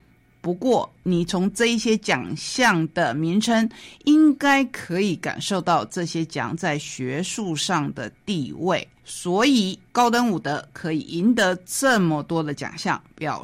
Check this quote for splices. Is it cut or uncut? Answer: cut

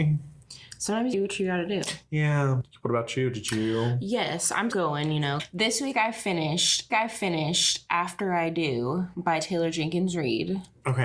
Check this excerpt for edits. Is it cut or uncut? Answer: cut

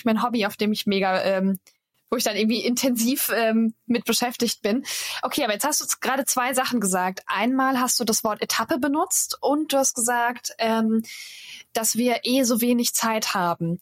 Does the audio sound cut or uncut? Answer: uncut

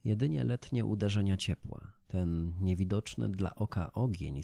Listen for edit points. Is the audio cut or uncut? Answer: cut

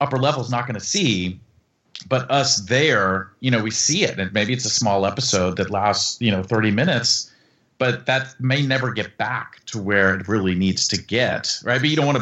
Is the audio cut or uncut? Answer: uncut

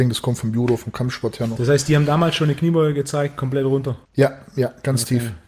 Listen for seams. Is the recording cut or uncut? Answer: cut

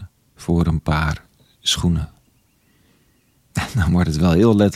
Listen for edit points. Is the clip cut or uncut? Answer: uncut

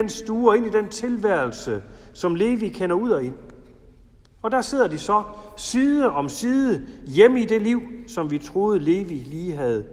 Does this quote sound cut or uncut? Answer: uncut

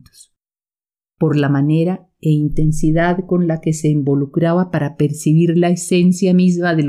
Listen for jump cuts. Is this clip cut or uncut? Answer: uncut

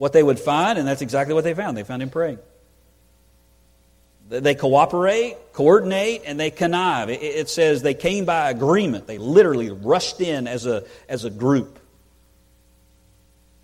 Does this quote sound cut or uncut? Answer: uncut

